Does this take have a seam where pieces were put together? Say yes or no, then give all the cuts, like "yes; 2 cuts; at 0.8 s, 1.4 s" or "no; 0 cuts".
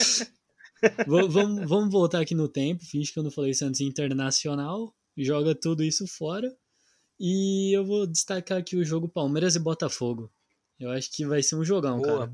no; 0 cuts